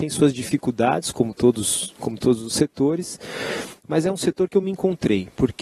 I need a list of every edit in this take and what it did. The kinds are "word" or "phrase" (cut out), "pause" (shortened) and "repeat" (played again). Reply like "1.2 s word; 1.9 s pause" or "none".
none